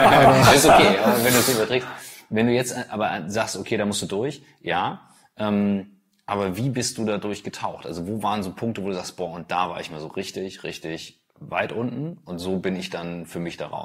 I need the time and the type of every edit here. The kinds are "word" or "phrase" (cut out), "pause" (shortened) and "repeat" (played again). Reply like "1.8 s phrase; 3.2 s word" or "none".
none